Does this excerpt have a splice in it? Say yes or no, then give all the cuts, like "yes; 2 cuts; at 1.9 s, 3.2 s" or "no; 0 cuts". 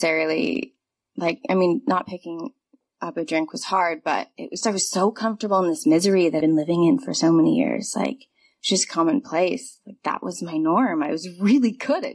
yes; 2 cuts; at 4.6 s, 6.4 s